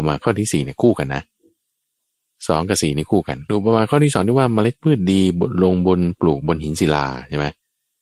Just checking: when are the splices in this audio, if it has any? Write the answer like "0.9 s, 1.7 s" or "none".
3.5 s